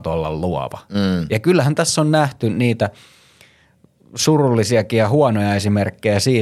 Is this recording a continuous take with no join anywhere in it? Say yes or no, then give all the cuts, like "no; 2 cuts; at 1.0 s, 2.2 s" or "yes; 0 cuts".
yes; 0 cuts